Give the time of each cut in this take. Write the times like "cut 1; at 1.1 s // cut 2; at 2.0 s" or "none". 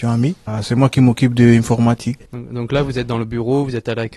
none